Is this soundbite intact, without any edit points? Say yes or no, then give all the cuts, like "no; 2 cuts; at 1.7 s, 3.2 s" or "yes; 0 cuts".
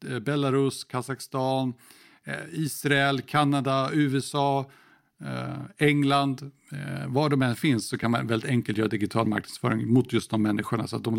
yes; 0 cuts